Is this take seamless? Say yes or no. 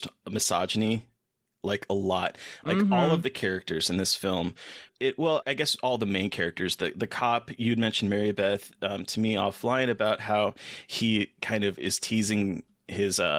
no